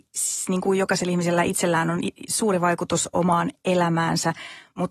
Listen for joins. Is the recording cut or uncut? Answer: uncut